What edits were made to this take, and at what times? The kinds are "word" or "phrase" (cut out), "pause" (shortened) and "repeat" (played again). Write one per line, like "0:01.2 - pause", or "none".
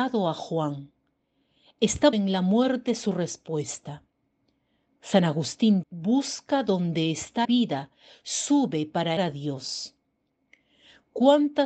0:02.1 - word
0:05.8 - word
0:07.4 - word
0:09.2 - word